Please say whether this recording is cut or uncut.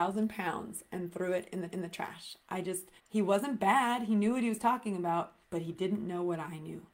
cut